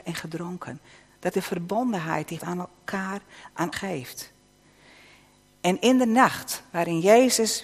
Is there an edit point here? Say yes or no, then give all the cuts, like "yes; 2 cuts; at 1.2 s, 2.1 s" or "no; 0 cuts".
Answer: yes; 3 cuts; at 1.3 s, 2.4 s, 3.7 s